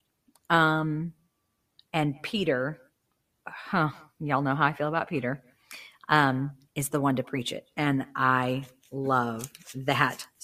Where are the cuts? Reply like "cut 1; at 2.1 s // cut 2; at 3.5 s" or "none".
none